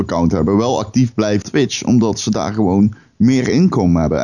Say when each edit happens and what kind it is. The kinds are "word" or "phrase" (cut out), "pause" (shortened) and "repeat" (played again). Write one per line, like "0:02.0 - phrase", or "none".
0:01.4 - word